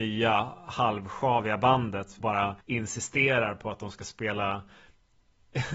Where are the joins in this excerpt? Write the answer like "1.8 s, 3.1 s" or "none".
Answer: 2.2 s, 2.6 s

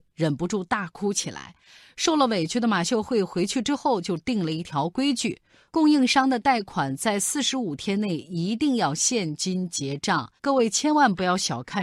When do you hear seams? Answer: 10.4 s

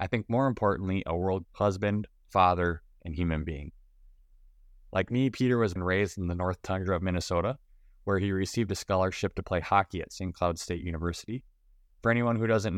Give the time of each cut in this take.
1.4 s, 5.8 s

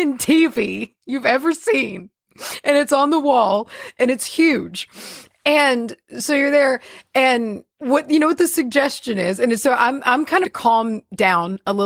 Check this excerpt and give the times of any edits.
1.0 s, 7.7 s, 10.4 s

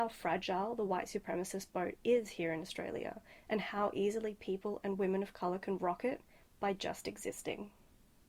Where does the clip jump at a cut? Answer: none

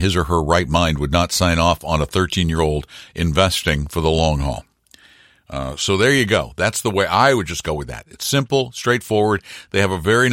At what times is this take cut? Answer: none

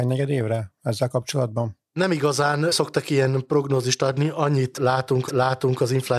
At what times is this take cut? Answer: 5.3 s

